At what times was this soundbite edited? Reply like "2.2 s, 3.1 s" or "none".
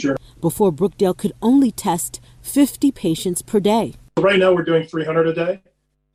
none